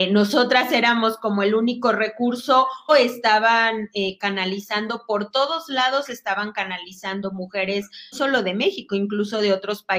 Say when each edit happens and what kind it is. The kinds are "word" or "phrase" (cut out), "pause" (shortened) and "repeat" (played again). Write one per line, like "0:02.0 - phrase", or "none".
0:02.9 - word
0:08.1 - word